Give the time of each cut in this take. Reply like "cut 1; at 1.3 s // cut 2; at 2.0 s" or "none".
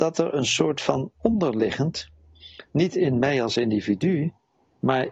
none

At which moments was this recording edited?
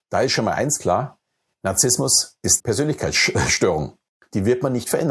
cut 1; at 1.5 s // cut 2; at 2.6 s

